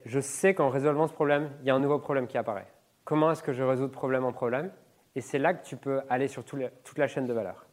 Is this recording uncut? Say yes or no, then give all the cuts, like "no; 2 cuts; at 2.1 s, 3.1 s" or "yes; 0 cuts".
yes; 0 cuts